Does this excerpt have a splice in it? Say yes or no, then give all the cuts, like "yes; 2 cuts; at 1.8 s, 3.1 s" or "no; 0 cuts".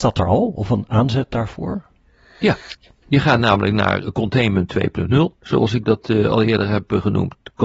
no; 0 cuts